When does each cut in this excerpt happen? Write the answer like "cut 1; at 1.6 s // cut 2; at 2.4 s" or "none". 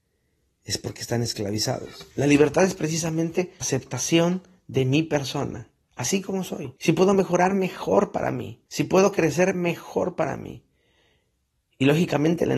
cut 1; at 2.1 s // cut 2; at 3.6 s // cut 3; at 6.8 s // cut 4; at 8.7 s